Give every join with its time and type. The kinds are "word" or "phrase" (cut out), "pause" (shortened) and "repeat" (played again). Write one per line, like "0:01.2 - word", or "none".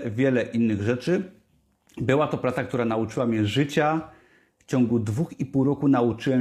none